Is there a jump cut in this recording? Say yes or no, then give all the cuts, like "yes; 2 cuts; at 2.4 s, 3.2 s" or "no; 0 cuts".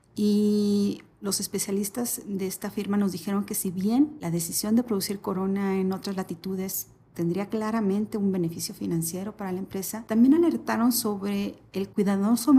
no; 0 cuts